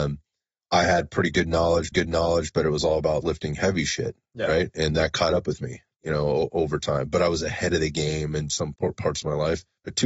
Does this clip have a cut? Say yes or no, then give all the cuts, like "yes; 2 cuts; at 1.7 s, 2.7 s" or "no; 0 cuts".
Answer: yes; 3 cuts; at 1.9 s, 3.2 s, 8.7 s